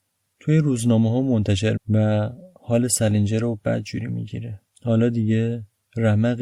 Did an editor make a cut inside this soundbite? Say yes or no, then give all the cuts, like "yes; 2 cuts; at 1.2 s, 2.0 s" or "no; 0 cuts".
yes; 2 cuts; at 1.8 s, 4.7 s